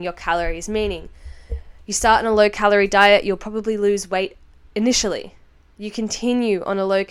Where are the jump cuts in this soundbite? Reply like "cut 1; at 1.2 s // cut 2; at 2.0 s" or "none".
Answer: none